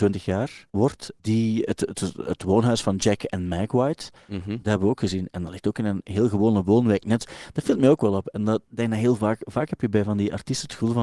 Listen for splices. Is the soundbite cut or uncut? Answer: uncut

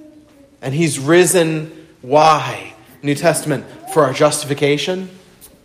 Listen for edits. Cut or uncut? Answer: uncut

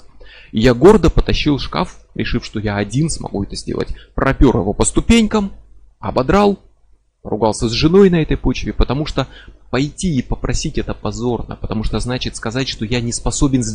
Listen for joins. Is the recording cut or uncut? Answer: uncut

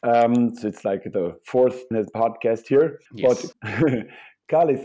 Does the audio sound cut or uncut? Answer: cut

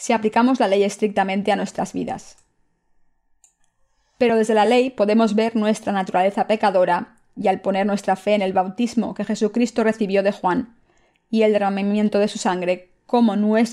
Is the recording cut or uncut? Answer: uncut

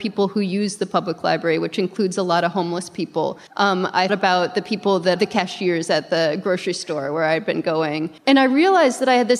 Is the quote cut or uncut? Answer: cut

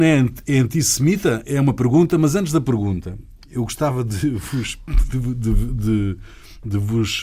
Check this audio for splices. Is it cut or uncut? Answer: uncut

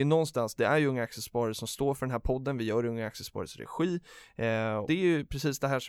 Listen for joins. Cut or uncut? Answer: cut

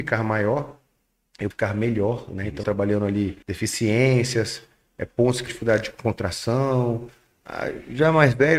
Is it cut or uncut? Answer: cut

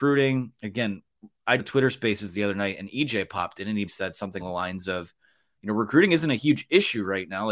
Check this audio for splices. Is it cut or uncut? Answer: cut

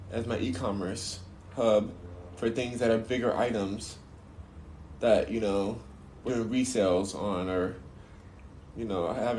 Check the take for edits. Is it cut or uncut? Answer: cut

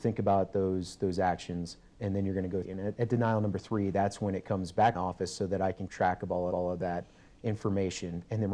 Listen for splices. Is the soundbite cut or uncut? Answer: cut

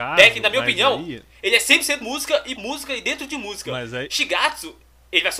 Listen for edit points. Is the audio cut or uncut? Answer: cut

